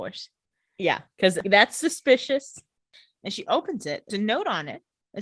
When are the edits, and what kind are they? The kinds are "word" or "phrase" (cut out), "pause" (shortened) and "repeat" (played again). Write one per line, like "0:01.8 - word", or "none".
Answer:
0:04.1 - word